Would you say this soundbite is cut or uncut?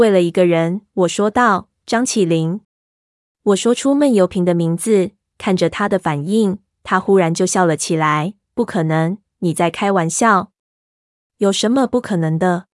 uncut